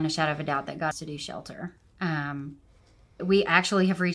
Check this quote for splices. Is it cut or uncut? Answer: cut